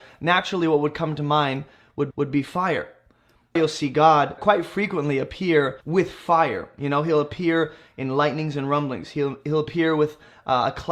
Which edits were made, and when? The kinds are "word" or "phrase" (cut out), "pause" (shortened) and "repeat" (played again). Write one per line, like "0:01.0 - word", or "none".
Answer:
0:02.1 - repeat
0:03.6 - phrase
0:04.4 - word
0:05.8 - pause